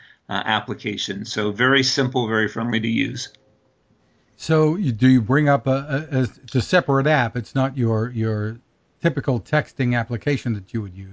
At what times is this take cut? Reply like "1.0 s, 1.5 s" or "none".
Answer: none